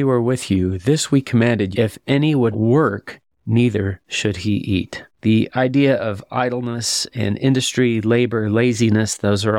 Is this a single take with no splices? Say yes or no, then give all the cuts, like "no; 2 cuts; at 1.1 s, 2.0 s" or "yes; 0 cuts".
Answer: no; 3 cuts; at 1.7 s, 2.5 s, 5.1 s